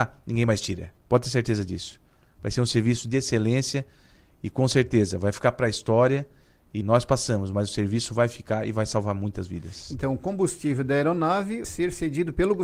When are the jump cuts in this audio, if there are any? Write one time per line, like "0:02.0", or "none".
0:01.0
0:06.8
0:11.6